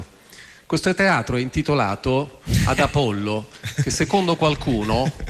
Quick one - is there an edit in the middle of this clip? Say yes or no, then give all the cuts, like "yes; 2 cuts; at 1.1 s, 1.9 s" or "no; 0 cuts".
no; 0 cuts